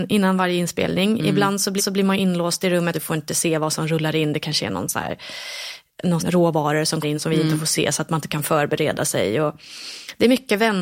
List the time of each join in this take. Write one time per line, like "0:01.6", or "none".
0:01.8
0:02.9
0:06.2
0:07.0